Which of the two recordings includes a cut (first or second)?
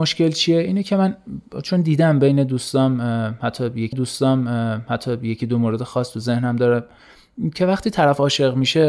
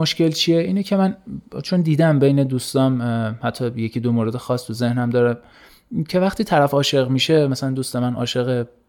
first